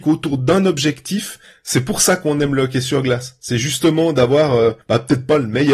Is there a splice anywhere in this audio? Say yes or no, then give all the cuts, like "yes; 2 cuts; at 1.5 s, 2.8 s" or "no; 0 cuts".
yes; 2 cuts; at 1.4 s, 4.8 s